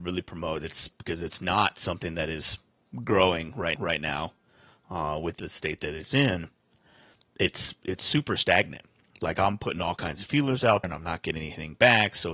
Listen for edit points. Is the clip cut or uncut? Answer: cut